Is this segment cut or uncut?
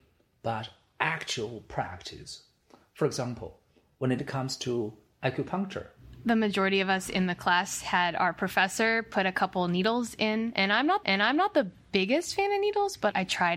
cut